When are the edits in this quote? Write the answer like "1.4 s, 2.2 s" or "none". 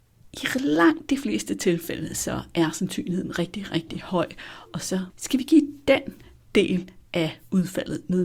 none